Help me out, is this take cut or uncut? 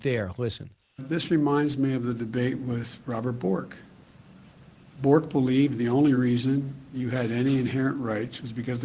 uncut